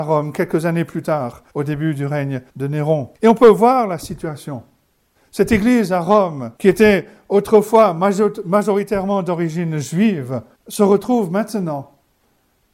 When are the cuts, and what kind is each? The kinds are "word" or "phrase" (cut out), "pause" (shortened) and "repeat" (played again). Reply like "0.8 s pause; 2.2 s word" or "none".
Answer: 1.5 s pause; 2.5 s pause; 3.1 s pause; 5.1 s pause; 6.6 s pause; 10.5 s pause